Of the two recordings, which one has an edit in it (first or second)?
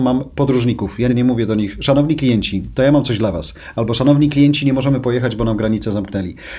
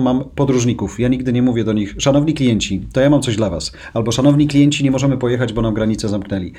first